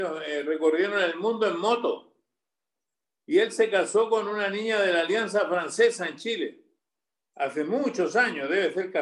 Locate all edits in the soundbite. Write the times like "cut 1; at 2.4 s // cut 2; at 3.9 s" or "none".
none